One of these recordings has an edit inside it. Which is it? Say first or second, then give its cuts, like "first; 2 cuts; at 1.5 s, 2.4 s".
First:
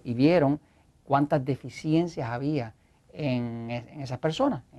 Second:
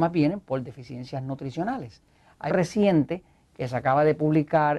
second; 1 cut; at 2.5 s